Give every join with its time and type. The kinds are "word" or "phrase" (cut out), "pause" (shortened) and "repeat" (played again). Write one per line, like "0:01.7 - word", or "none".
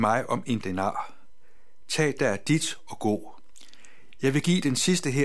0:02.2 - word